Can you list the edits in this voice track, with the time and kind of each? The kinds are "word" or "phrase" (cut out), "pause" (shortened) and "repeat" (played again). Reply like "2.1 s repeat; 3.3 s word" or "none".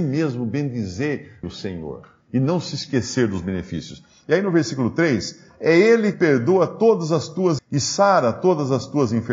1.4 s word; 6.1 s word; 7.6 s word